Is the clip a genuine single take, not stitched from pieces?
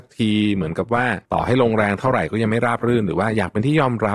no; 1 cut; at 1.2 s

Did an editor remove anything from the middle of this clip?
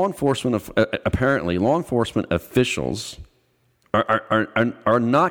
no; 0 cuts

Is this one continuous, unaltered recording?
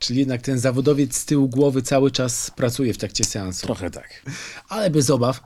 no; 1 cut; at 3.9 s

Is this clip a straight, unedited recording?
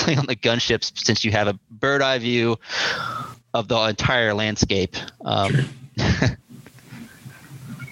yes; 0 cuts

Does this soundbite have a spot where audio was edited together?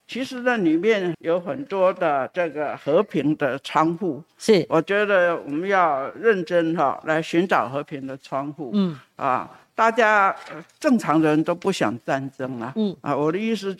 yes; 1 cut; at 1.1 s

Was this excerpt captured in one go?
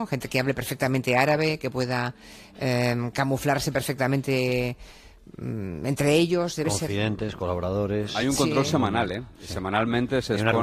yes; 0 cuts

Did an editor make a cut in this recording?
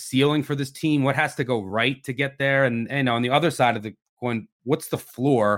no; 0 cuts

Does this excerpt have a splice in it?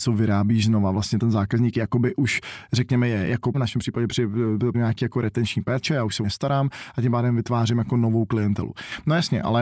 yes; 4 cuts; at 1.2 s, 3.5 s, 4.7 s, 6.2 s

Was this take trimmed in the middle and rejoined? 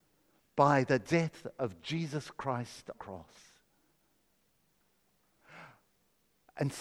yes; 1 cut; at 2.9 s

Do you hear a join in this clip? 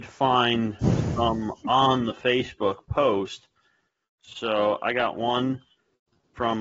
no; 0 cuts

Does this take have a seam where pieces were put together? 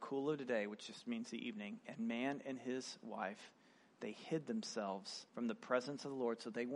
yes; 1 cut; at 5.3 s

